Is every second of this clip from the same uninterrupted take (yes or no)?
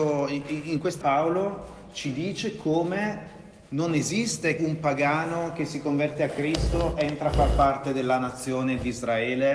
no